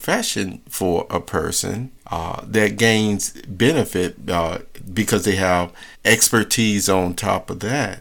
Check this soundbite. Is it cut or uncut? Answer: cut